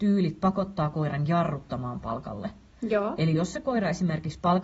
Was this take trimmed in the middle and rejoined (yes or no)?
no